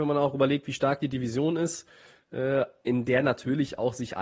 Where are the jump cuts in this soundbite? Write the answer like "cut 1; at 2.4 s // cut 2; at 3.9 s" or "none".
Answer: none